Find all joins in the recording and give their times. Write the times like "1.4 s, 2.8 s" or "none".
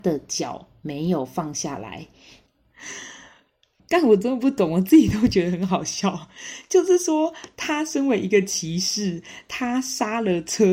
none